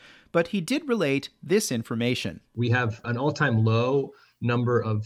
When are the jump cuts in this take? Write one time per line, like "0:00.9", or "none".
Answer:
0:03.0